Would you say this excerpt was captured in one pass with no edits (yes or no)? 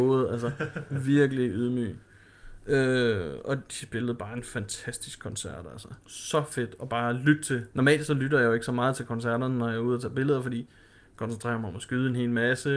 no